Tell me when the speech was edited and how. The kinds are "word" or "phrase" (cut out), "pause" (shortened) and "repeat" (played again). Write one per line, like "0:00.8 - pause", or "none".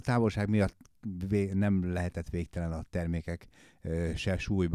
none